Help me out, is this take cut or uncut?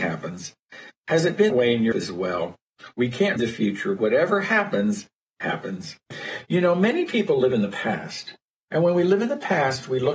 cut